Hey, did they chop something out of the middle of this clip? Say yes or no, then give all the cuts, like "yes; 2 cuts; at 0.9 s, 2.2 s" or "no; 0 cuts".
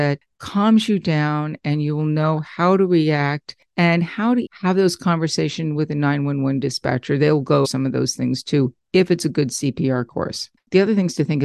yes; 2 cuts; at 4.5 s, 7.6 s